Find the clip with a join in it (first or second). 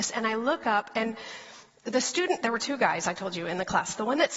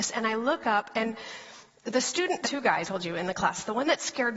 second